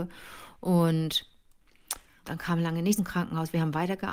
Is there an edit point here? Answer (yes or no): yes